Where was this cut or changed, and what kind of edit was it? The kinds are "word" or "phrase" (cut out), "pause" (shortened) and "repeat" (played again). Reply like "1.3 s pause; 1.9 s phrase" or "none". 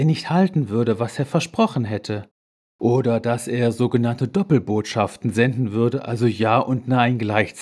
none